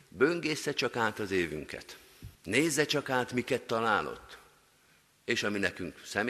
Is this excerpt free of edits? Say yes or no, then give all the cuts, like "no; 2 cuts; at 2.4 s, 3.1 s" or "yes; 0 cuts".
no; 1 cut; at 2.3 s